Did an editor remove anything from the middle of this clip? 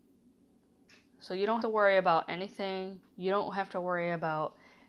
yes; 2 cuts; at 1.6 s, 3.0 s

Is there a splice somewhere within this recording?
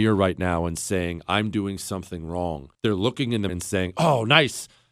yes; 2 cuts; at 2.7 s, 3.5 s

